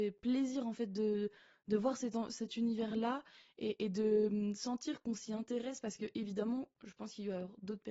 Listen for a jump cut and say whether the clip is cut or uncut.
uncut